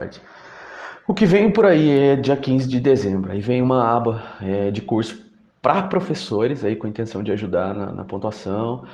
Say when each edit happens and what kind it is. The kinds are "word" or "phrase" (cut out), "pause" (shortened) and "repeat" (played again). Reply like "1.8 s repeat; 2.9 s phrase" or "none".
none